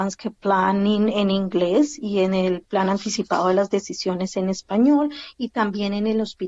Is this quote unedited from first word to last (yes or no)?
yes